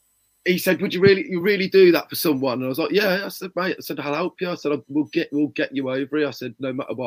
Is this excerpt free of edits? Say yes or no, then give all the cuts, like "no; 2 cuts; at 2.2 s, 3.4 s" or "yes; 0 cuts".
yes; 0 cuts